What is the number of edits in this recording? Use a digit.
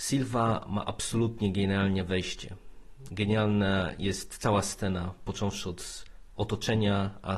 0